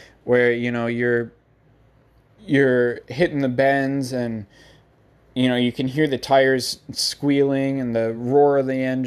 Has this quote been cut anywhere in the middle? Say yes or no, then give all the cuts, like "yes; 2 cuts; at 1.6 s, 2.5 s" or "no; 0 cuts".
no; 0 cuts